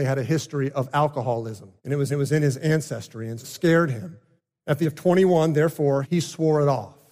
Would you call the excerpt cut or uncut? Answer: cut